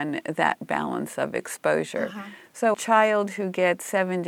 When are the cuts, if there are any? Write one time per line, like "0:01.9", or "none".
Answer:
0:02.7